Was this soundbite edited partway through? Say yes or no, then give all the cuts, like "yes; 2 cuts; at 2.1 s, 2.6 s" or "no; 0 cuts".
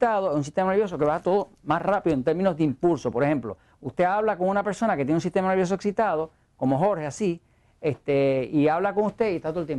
no; 0 cuts